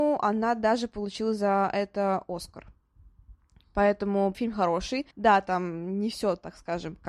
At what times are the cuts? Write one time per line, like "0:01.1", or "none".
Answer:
0:04.3
0:05.1